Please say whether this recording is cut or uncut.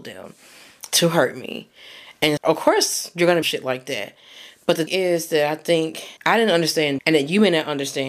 cut